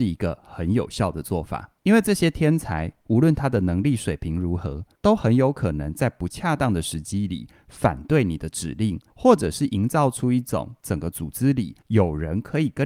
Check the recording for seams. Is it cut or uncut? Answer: cut